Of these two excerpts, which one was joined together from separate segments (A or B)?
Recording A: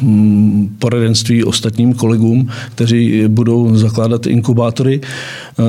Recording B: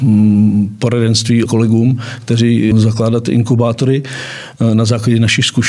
B